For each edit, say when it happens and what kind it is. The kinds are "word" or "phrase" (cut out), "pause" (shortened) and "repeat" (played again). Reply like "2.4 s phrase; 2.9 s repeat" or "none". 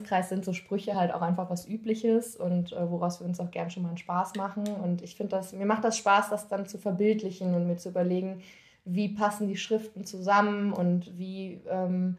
none

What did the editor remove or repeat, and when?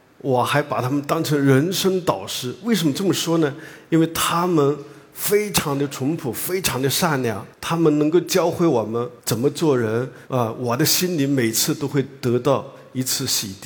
7.5 s pause; 9.2 s pause; 10.3 s pause

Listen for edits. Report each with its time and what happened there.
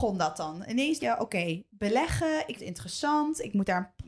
1.0 s word; 1.7 s pause; 2.6 s word

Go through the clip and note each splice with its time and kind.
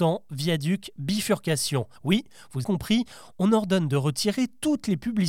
2.0 s pause; 2.6 s word

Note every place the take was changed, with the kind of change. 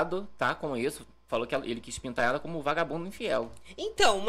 none

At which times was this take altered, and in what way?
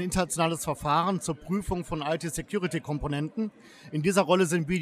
none

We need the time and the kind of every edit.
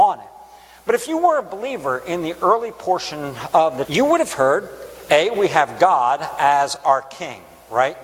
3.8 s word

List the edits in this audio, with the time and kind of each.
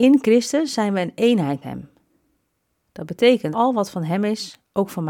1.6 s word; 3.5 s word

